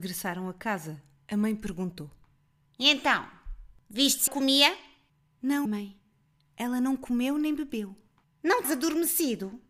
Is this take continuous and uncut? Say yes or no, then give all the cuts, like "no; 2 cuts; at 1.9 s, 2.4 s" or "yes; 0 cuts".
no; 3 cuts; at 4.3 s, 5.7 s, 8.6 s